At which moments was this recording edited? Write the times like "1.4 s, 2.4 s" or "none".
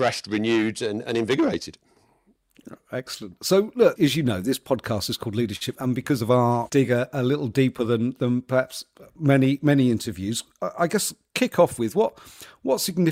4.0 s, 5.8 s, 6.7 s